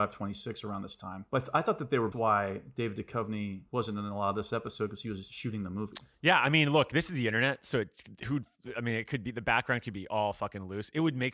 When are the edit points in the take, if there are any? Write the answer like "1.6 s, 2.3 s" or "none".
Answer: 1.3 s, 2.1 s, 3.7 s